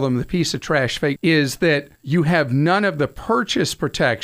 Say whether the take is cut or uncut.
cut